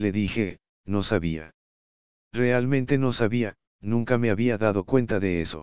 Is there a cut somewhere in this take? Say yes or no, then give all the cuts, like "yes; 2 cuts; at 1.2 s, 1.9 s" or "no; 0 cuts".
no; 0 cuts